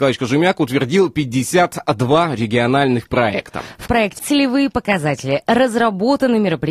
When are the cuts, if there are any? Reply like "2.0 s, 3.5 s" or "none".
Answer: 3.9 s, 4.2 s